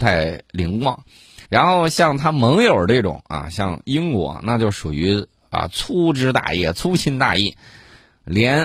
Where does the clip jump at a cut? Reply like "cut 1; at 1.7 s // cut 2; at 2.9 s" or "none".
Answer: cut 1; at 1.4 s